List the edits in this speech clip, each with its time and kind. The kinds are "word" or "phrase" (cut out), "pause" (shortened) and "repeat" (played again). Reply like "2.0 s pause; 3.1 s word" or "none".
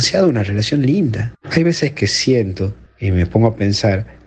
1.3 s pause